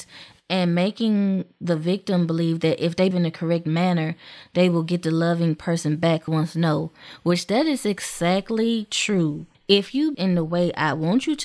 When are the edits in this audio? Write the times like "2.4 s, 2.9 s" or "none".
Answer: 3.1 s, 6.3 s, 9.5 s, 10.1 s